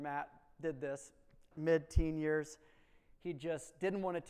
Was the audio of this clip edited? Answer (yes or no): yes